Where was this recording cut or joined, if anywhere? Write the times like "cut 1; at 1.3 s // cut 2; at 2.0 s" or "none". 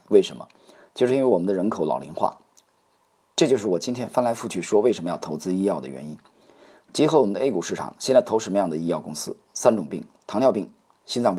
none